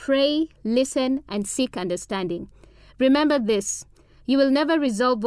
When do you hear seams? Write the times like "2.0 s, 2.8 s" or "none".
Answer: none